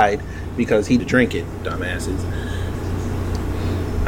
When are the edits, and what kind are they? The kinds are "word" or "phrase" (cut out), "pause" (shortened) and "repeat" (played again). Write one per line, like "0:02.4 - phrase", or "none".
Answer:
0:01.0 - word